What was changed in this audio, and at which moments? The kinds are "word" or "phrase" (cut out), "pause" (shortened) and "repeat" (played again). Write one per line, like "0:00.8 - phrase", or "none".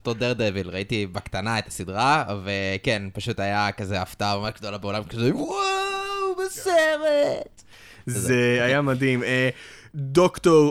none